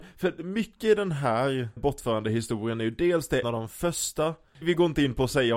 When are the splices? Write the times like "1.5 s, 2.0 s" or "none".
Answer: 1.8 s, 3.4 s, 4.6 s